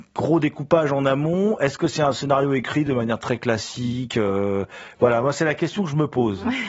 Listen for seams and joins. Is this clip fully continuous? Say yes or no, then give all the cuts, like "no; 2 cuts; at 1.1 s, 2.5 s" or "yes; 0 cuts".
yes; 0 cuts